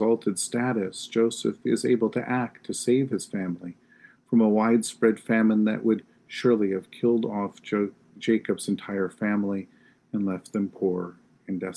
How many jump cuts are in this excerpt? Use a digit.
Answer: 0